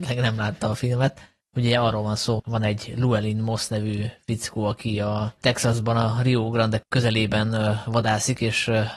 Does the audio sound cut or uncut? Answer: cut